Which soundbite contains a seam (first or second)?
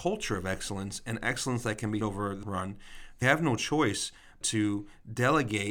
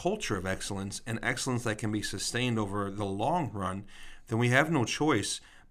first